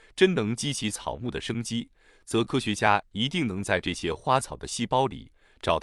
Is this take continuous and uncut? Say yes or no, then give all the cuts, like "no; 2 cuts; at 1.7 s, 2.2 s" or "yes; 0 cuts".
yes; 0 cuts